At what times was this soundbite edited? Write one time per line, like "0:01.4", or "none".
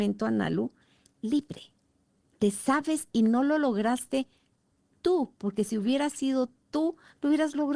0:03.1